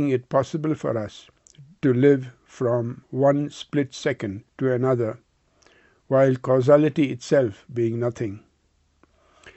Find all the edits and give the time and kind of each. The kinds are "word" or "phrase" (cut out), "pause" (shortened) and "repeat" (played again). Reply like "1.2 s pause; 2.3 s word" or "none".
4.5 s pause